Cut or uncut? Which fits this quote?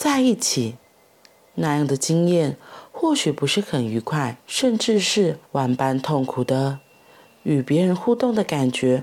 cut